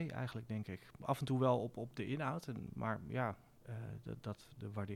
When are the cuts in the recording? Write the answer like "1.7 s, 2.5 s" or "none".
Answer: none